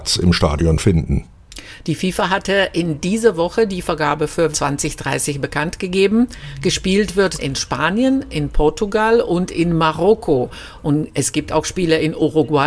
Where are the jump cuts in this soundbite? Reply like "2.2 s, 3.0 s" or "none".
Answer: 4.5 s, 7.4 s